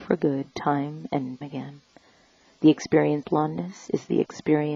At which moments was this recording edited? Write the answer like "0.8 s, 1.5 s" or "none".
1.4 s, 3.2 s